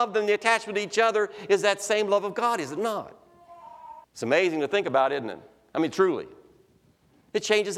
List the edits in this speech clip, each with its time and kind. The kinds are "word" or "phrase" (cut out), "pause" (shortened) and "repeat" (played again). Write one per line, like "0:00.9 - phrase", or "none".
0:04.0 - pause

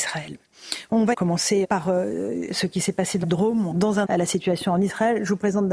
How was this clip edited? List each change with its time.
0:01.1 - word
0:01.6 - word
0:02.5 - word
0:03.2 - word
0:03.7 - word
0:04.0 - word

